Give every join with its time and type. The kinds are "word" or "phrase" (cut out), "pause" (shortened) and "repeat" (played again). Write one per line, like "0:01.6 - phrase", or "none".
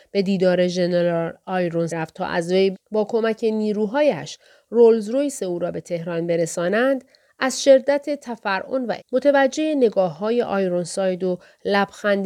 0:01.9 - word
0:02.7 - phrase
0:09.0 - word